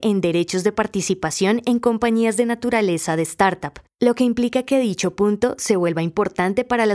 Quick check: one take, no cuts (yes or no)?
yes